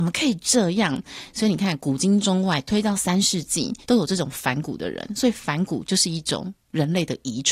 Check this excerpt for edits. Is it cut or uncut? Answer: cut